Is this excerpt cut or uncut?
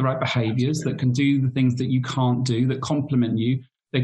uncut